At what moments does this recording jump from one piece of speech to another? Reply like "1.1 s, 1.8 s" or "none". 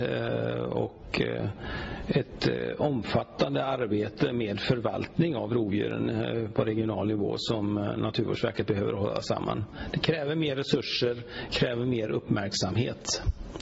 none